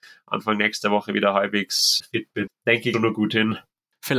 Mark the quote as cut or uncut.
cut